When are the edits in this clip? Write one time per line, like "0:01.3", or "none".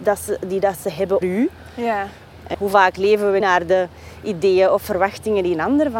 0:01.2
0:02.5
0:03.4